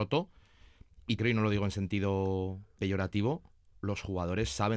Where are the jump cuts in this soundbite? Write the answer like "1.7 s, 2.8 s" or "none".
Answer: 1.2 s, 2.8 s